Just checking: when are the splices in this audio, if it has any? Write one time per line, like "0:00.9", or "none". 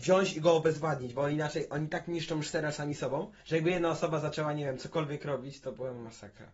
0:03.4

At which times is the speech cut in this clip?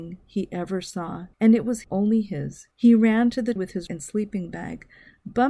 0:01.3
0:01.8
0:02.7
0:03.6
0:03.9

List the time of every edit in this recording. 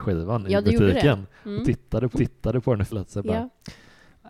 0:02.1
0:02.9

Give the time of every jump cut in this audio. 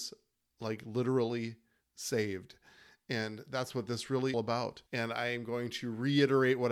0:04.3
0:04.9

